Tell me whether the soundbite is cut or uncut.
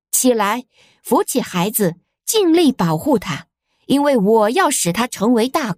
uncut